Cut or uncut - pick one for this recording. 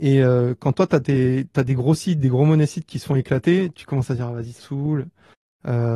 cut